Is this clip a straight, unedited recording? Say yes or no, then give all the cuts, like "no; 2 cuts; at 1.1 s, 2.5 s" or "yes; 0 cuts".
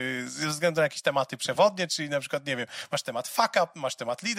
yes; 0 cuts